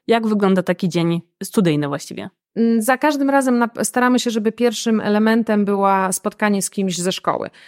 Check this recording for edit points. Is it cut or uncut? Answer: uncut